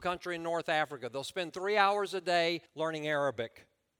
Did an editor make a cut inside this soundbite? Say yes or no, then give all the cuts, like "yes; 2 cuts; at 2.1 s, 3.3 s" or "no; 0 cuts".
yes; 1 cut; at 2.7 s